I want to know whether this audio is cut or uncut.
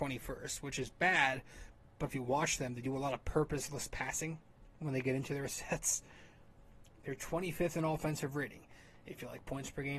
cut